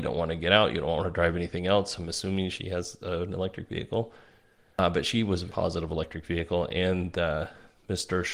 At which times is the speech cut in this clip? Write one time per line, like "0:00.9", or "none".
0:05.5